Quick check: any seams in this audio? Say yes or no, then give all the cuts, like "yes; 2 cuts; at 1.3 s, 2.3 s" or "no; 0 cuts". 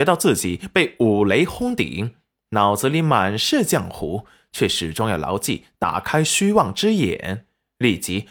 no; 0 cuts